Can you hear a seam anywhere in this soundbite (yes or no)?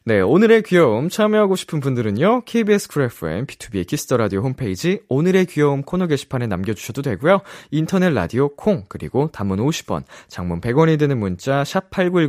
no